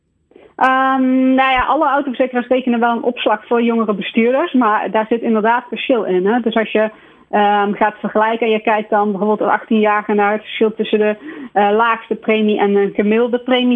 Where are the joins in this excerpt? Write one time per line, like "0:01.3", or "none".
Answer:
none

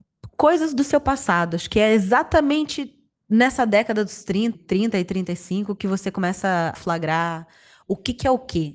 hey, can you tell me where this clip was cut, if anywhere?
0:04.5
0:06.7

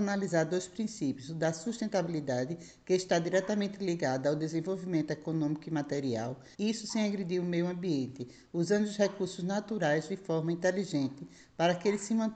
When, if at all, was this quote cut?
0:06.5

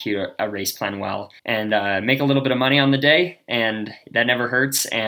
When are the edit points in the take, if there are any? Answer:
0:01.4

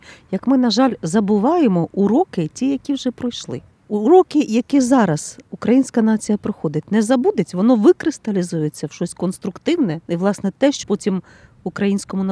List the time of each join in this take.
0:10.0
0:10.8

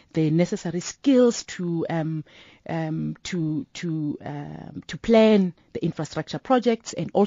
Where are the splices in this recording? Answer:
none

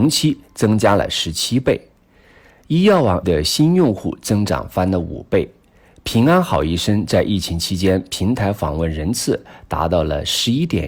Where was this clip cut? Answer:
0:03.2

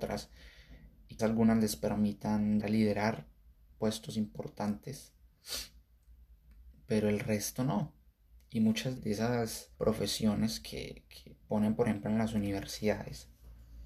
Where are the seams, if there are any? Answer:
0:01.2
0:02.6
0:09.0
0:09.7

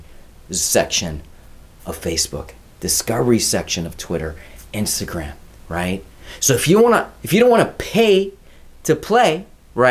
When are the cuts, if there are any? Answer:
none

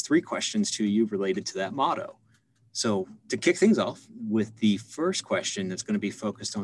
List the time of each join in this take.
none

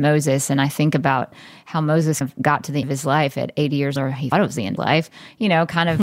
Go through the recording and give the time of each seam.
0:02.2
0:02.8
0:04.0
0:04.3
0:04.8

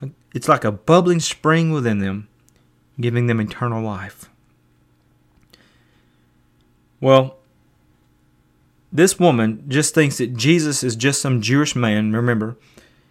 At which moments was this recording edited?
none

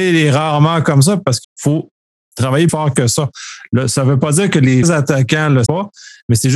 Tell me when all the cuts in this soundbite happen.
0:01.4
0:02.7
0:04.8
0:05.7

